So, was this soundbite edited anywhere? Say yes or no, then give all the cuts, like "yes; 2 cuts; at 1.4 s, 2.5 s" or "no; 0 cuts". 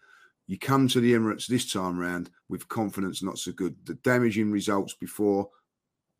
yes; 1 cut; at 2.4 s